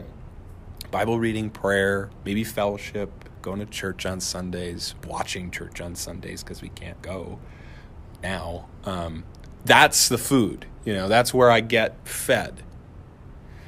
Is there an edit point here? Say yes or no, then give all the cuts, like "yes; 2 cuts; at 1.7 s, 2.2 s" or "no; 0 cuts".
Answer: no; 0 cuts